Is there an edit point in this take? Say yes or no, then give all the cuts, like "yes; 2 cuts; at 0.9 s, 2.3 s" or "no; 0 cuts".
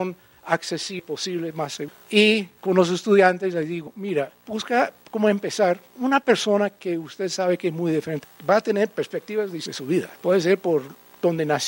yes; 2 cuts; at 2.6 s, 10.1 s